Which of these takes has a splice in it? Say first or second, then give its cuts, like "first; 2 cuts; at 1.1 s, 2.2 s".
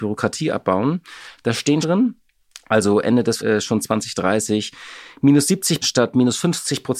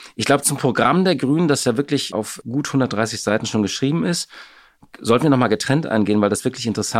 first; 3 cuts; at 1.8 s, 3.4 s, 5.8 s